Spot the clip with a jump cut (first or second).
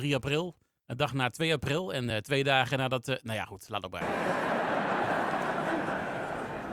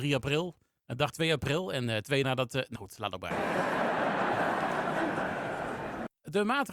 second